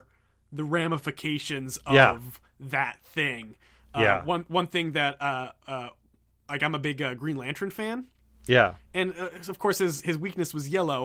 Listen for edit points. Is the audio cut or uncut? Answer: uncut